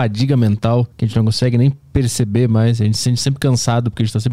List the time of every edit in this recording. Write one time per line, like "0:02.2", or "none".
0:00.9